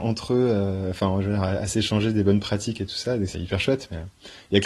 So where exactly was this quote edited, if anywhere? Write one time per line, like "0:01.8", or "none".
0:03.3